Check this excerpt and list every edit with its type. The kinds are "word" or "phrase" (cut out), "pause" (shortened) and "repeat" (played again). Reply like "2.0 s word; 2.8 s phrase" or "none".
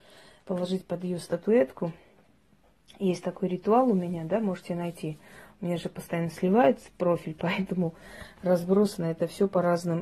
none